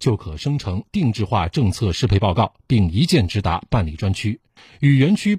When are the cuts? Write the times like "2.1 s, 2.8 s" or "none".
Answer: none